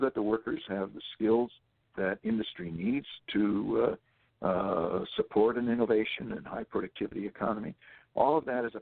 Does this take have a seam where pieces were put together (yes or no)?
yes